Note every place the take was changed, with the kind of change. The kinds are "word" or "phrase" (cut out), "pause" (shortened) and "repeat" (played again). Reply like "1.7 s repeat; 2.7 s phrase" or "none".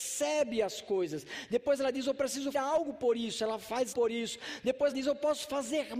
2.5 s word; 3.9 s word; 4.9 s word